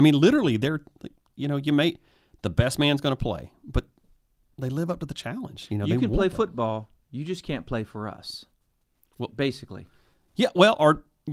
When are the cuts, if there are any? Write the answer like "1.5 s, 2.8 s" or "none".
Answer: none